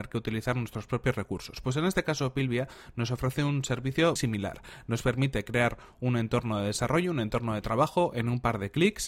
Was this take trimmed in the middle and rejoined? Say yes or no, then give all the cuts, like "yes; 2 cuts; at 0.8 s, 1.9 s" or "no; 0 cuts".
yes; 1 cut; at 4.2 s